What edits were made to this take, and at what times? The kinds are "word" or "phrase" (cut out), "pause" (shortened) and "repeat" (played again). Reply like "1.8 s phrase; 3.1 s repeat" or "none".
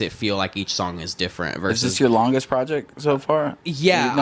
none